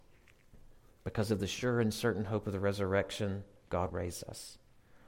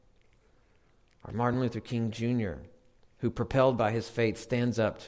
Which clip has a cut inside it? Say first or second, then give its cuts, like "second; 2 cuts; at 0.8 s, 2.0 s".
first; 1 cut; at 3.9 s